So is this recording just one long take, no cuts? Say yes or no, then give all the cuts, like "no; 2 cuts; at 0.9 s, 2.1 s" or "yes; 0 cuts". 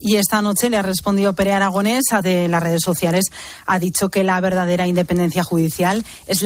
no; 1 cut; at 2.2 s